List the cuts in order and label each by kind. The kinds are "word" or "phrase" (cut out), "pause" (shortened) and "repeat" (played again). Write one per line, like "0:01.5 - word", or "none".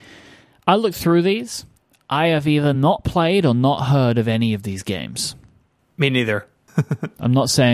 none